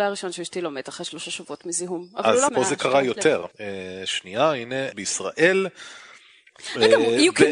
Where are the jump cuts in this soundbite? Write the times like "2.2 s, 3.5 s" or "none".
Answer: 2.5 s, 3.5 s, 4.9 s

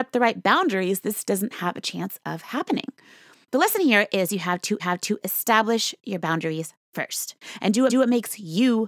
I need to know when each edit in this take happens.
4.8 s, 7.9 s

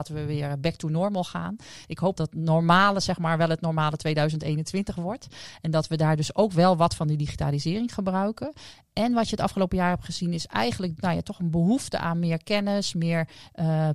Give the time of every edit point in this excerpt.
2.2 s

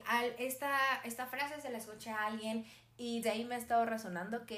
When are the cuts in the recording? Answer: 3.2 s

